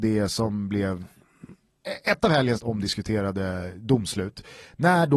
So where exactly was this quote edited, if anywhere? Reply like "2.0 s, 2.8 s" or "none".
2.6 s